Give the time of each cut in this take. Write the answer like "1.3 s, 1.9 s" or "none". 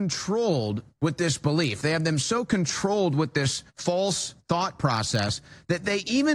0.9 s, 3.7 s